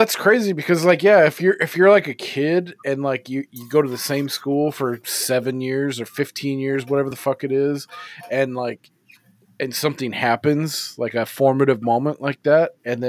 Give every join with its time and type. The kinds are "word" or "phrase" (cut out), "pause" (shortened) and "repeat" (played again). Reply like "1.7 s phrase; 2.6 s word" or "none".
none